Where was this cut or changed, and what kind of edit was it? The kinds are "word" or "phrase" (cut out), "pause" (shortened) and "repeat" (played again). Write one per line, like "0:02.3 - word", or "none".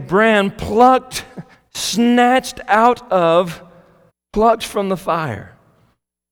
0:01.5 - pause
0:04.1 - pause

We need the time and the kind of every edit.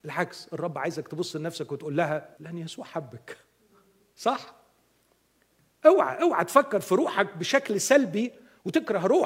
0:02.4 - phrase

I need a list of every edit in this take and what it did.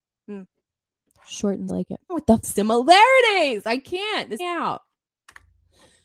0:01.7 - phrase
0:02.1 - word
0:02.4 - word
0:04.4 - phrase

